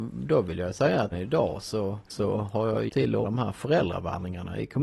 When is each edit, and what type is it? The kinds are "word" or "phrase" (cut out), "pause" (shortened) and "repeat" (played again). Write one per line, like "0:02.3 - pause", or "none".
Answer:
0:01.1 - word
0:02.1 - word
0:02.9 - word
0:03.2 - word

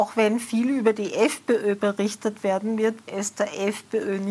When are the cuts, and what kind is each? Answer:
0:03.1 - word

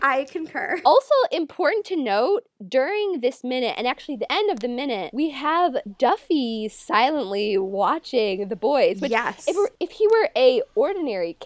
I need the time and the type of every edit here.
none

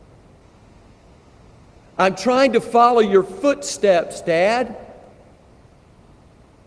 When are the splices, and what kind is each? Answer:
none

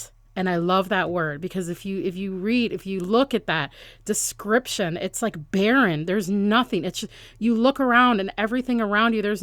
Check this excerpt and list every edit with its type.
none

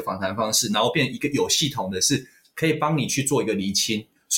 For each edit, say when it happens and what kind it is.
none

